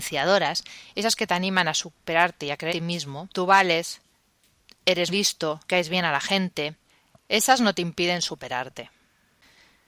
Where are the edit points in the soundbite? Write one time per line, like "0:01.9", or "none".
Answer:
0:02.7
0:03.3
0:05.1
0:05.6
0:06.9